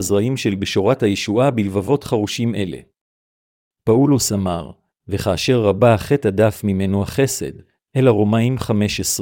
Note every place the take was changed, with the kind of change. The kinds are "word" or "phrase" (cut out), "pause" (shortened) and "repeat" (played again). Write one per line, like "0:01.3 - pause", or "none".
none